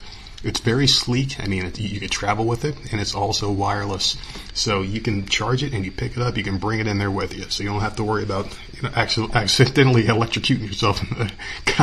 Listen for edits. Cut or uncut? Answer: uncut